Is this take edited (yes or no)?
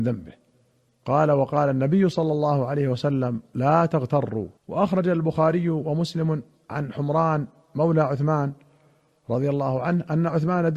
yes